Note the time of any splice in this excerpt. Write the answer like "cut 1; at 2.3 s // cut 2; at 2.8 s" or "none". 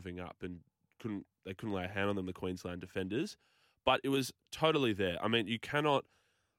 none